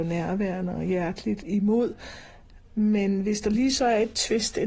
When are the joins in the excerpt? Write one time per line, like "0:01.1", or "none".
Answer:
none